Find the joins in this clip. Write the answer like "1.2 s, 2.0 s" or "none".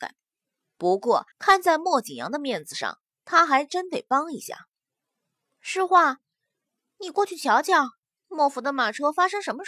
1.3 s